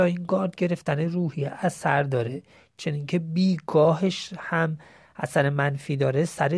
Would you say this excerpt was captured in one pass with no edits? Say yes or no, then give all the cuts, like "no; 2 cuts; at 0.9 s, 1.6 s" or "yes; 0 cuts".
yes; 0 cuts